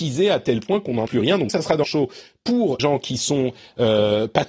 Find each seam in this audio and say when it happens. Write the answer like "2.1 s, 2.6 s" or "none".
1.1 s, 1.5 s, 1.8 s, 2.8 s